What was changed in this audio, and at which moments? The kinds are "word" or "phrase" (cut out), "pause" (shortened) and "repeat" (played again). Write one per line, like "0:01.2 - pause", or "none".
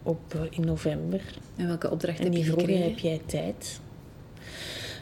none